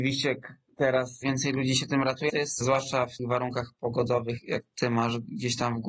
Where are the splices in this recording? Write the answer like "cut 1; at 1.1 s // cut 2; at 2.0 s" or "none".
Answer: cut 1; at 1.2 s // cut 2; at 2.3 s // cut 3; at 2.6 s // cut 4; at 3.2 s // cut 5; at 4.4 s